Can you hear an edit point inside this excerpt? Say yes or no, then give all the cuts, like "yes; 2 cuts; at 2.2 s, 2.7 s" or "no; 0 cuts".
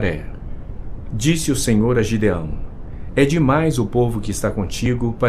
no; 0 cuts